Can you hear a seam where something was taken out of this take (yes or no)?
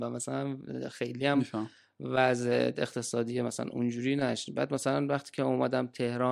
no